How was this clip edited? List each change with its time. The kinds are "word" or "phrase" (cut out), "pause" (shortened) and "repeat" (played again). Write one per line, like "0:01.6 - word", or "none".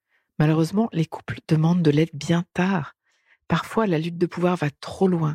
none